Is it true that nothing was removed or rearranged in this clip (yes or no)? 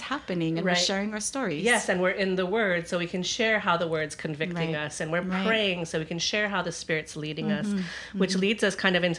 yes